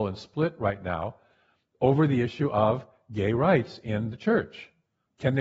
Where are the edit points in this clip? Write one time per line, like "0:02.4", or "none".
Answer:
none